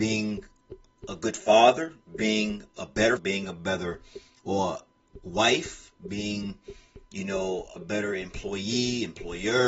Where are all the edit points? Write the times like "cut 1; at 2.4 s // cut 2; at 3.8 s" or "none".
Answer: cut 1; at 3.2 s // cut 2; at 7.8 s